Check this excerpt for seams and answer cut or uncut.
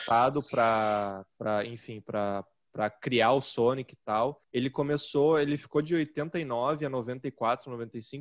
uncut